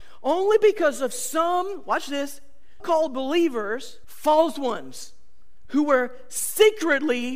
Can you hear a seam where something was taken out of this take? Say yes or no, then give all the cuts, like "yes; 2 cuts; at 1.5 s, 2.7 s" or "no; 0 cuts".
yes; 3 cuts; at 2.8 s, 4.0 s, 5.6 s